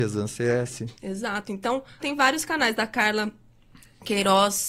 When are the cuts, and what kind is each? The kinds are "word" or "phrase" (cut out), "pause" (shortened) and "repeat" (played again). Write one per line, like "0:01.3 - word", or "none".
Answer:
0:01.0 - pause
0:02.0 - word